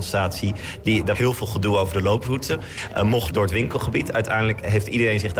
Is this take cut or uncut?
cut